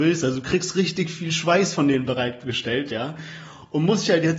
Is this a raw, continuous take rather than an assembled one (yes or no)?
yes